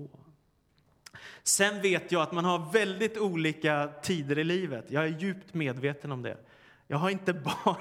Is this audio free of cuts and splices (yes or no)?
yes